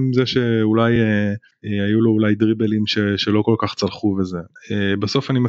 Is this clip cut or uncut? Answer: uncut